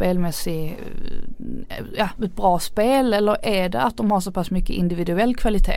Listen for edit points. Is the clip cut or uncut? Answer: cut